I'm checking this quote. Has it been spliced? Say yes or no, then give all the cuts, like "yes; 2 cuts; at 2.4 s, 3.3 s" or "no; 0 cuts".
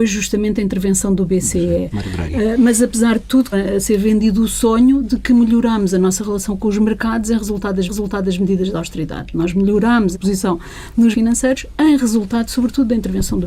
yes; 4 cuts; at 3.5 s, 7.9 s, 10.1 s, 11.1 s